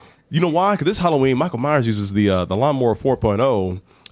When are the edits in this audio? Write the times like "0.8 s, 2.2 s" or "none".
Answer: none